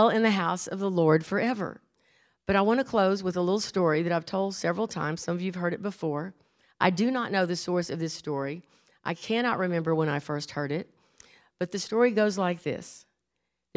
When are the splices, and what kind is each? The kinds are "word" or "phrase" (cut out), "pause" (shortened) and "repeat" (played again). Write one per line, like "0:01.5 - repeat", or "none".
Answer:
none